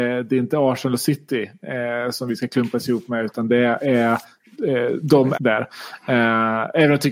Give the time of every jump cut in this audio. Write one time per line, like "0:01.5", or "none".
0:05.3